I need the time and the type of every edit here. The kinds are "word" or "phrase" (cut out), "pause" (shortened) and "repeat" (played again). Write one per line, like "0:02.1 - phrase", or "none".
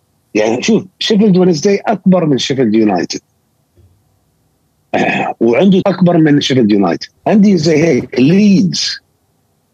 0:05.8 - word
0:07.2 - pause